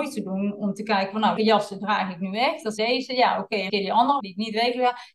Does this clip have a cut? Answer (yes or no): yes